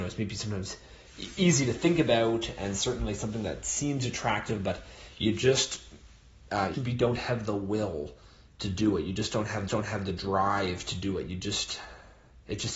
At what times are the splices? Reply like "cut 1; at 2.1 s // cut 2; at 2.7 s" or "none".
cut 1; at 6.7 s // cut 2; at 9.7 s